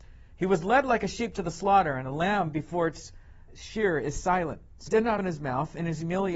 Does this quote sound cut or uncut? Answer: cut